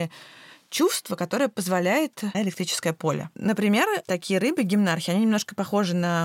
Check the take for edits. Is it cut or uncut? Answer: cut